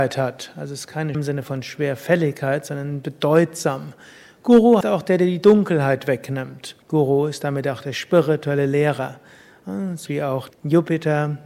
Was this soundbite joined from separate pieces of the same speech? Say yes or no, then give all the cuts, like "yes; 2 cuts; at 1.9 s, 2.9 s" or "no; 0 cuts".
yes; 5 cuts; at 1.1 s, 4.8 s, 6.8 s, 10.1 s, 10.5 s